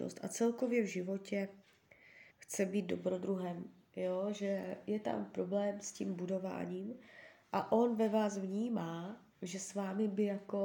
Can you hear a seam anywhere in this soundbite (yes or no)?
yes